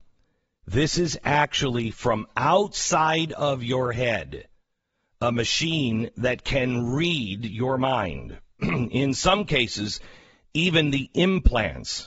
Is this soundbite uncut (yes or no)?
yes